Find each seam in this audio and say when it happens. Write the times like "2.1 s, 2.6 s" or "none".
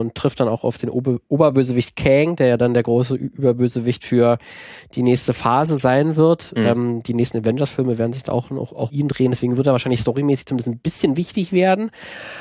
8.9 s